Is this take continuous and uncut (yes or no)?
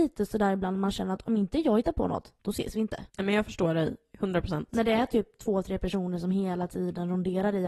no